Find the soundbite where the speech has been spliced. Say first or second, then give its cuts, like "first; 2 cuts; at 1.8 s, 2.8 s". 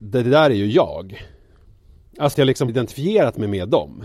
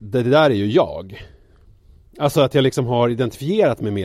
first; 2 cuts; at 2.3 s, 2.7 s